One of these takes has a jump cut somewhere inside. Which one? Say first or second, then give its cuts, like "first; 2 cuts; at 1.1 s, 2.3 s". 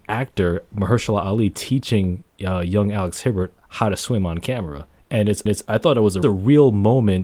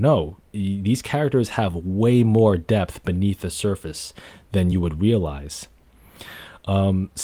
first; 2 cuts; at 5.5 s, 6.2 s